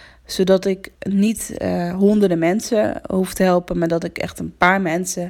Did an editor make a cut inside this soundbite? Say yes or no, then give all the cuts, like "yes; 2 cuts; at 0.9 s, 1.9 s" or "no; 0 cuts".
yes; 1 cut; at 0.9 s